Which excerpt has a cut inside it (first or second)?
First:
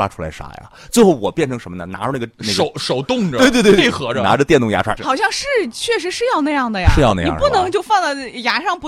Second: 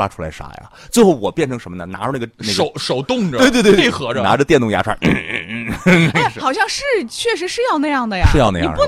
first